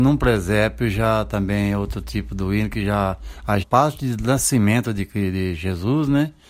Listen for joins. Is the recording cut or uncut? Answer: cut